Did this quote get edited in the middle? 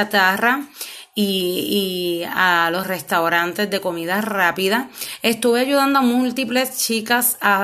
no; 0 cuts

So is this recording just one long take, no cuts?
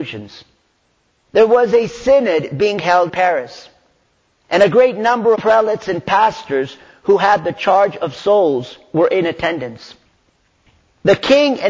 no; 2 cuts; at 3.1 s, 5.3 s

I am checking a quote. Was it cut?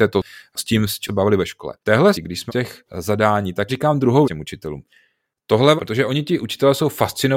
yes; 8 cuts; at 1.1 s, 1.8 s, 2.1 s, 2.5 s, 2.9 s, 3.7 s, 4.2 s, 5.8 s

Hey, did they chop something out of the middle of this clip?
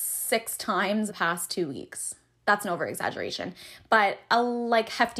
yes; 1 cut; at 1.1 s

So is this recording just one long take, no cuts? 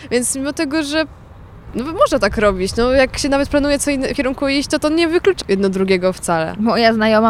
no; 2 cuts; at 4.1 s, 5.4 s

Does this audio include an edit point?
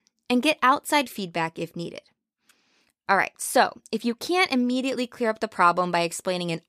no; 0 cuts

